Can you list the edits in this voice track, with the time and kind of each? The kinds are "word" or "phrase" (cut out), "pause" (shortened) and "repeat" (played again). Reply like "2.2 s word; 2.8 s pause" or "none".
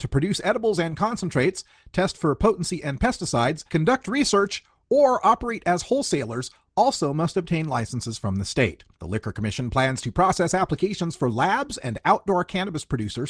3.7 s pause; 8.9 s pause